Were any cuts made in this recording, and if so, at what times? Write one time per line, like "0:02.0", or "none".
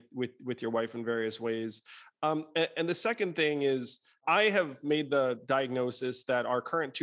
none